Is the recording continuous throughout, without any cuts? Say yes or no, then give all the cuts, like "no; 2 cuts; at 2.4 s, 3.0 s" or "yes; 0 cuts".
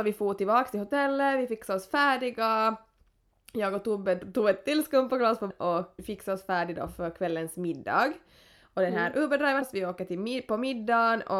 no; 3 cuts; at 5.5 s, 6.0 s, 9.6 s